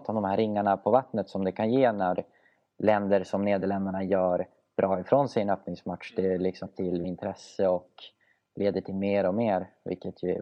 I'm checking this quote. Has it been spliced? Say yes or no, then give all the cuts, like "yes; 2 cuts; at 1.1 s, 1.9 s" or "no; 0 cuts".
yes; 2 cuts; at 6.7 s, 7.0 s